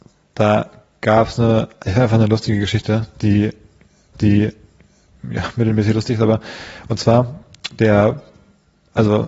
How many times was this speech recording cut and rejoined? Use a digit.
1